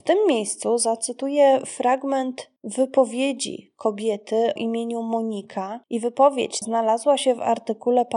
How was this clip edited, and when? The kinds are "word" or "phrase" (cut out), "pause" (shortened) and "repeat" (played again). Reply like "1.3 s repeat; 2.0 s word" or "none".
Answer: 2.6 s pause; 4.6 s word; 5.8 s pause; 6.6 s word